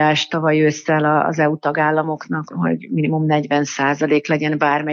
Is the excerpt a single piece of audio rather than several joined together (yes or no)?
yes